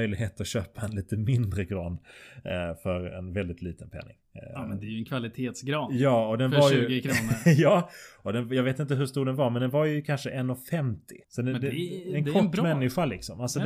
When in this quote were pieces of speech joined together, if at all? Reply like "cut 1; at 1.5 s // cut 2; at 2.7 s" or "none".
cut 1; at 11.2 s